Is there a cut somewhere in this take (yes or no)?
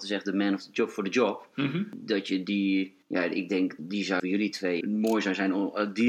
yes